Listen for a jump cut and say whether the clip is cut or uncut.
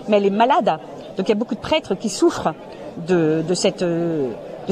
uncut